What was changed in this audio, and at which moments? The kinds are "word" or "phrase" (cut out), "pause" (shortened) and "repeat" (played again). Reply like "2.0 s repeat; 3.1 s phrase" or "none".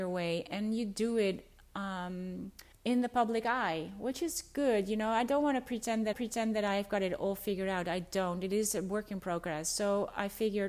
2.7 s pause; 6.1 s repeat